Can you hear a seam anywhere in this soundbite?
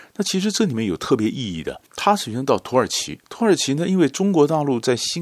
yes; 2 cuts; at 1.9 s, 3.2 s

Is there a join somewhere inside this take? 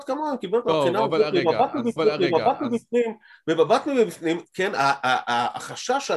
yes; 1 cut; at 2.0 s

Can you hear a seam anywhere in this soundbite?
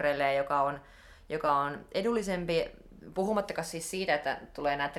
no; 0 cuts

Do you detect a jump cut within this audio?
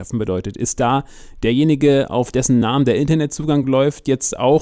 no; 0 cuts

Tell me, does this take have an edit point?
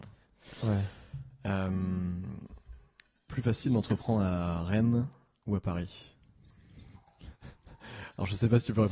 yes; 1 cut; at 3.3 s

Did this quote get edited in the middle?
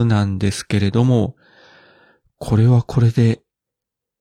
no; 0 cuts

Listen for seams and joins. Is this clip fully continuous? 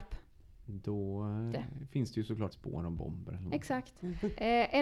no; 2 cuts; at 1.5 s, 2.5 s

